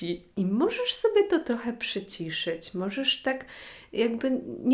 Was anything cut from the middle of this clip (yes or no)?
no